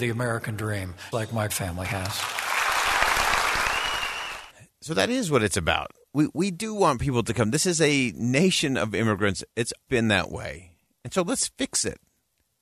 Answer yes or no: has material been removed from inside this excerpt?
yes